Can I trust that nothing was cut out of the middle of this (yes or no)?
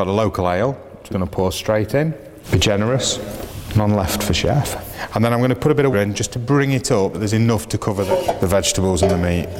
no